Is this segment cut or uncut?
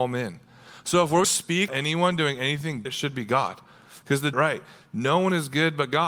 cut